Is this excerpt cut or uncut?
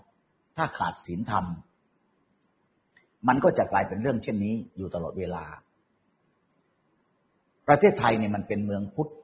uncut